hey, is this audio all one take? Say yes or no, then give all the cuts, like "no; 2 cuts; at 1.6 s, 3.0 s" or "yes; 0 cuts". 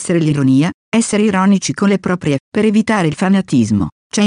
no; 1 cut; at 2.4 s